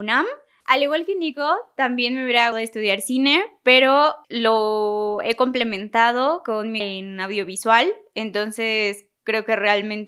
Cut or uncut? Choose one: cut